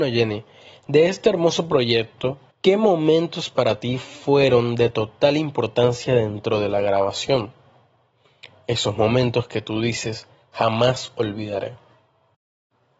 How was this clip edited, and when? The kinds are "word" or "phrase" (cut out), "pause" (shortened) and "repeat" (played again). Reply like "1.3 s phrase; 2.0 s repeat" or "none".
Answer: 2.5 s pause